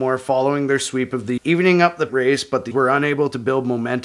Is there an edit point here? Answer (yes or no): yes